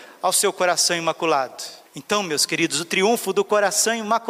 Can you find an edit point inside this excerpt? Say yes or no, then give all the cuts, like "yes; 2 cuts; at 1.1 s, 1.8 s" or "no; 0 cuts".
yes; 1 cut; at 1.9 s